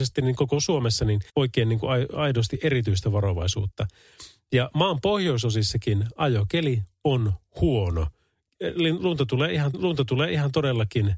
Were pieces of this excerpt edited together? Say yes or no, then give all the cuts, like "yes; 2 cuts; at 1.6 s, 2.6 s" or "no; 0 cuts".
yes; 2 cuts; at 1.3 s, 9.7 s